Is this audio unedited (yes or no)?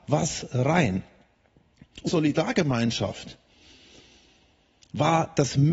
no